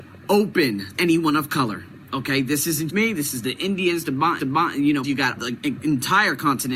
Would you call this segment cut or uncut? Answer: cut